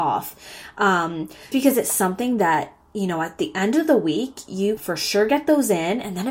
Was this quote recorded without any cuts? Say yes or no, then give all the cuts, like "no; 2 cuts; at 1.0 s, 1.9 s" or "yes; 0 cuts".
no; 2 cuts; at 1.5 s, 4.8 s